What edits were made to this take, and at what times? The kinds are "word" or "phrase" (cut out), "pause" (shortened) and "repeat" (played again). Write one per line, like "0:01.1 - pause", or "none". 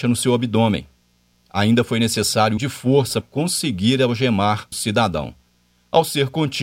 0:02.6 - word
0:03.2 - word
0:04.7 - word